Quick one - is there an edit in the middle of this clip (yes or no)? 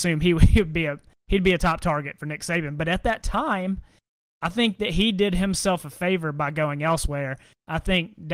no